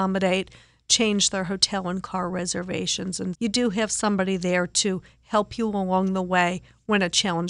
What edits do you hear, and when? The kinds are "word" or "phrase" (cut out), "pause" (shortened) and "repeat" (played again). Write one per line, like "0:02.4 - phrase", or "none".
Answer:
0:03.3 - word